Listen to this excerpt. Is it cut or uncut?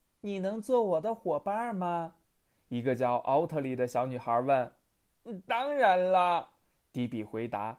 uncut